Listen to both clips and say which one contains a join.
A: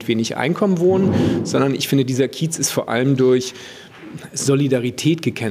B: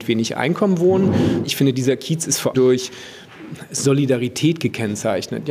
B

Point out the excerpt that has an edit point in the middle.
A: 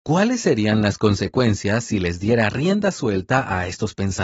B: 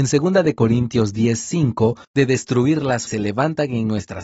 B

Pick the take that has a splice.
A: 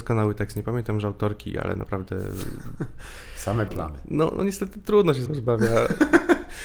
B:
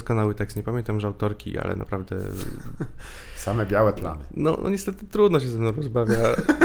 A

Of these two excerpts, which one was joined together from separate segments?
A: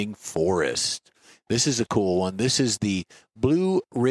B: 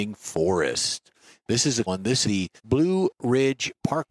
B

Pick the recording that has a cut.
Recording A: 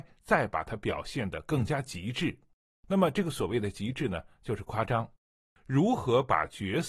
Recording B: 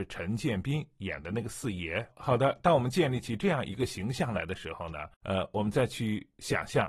B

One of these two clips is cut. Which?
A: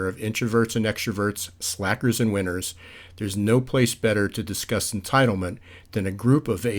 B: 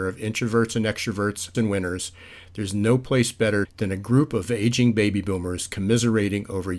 B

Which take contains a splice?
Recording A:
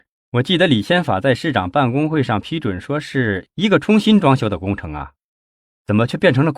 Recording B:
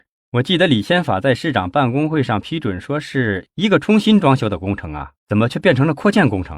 B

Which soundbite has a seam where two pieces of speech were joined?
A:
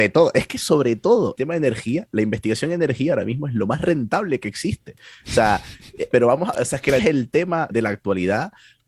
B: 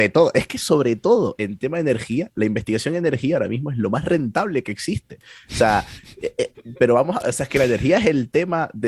A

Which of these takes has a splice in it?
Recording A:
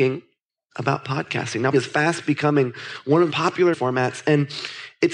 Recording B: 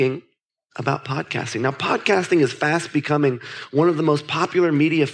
A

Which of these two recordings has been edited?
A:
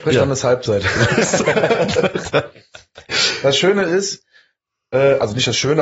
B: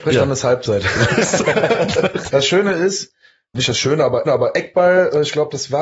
B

